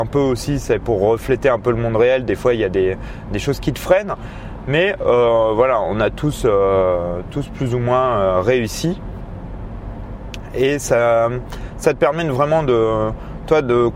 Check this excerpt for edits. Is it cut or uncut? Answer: uncut